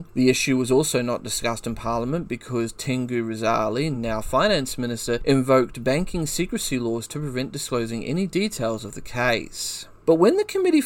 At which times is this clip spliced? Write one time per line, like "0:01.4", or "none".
none